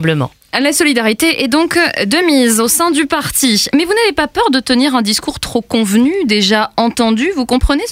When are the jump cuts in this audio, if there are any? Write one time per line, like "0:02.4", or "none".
none